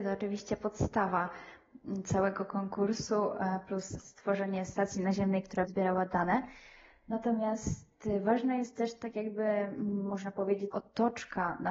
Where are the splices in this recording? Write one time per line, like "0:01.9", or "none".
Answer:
0:05.6
0:10.7